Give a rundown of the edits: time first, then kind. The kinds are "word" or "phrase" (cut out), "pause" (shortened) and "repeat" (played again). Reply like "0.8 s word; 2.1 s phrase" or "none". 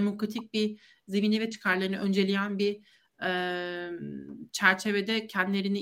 1.5 s word